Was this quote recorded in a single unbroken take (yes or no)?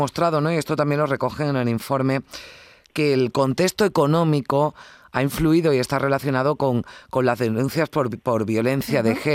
yes